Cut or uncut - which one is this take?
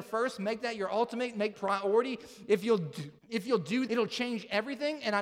cut